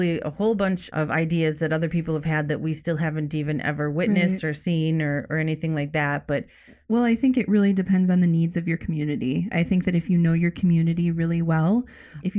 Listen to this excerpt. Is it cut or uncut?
uncut